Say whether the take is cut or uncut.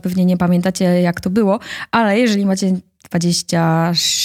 uncut